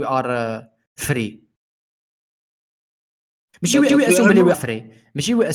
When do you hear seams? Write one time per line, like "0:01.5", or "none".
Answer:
0:03.9
0:04.5

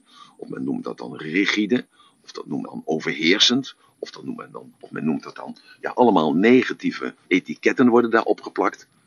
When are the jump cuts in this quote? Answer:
0:02.6
0:04.7
0:07.2

